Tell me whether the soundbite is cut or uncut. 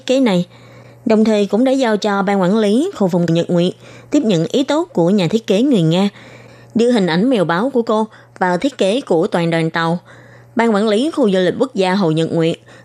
cut